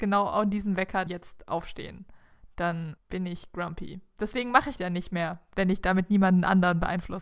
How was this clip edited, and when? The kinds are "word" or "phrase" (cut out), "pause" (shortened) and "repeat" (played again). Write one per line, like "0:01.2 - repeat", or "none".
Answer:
0:01.1 - word
0:03.0 - word
0:04.8 - word